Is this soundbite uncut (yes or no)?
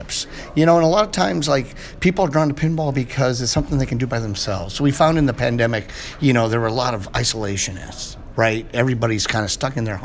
yes